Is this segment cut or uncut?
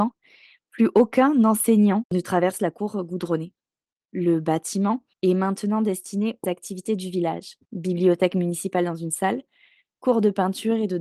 cut